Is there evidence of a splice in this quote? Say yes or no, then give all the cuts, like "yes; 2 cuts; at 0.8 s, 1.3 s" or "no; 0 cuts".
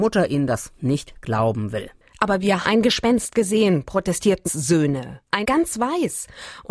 yes; 3 cuts; at 2.6 s, 4.4 s, 5.4 s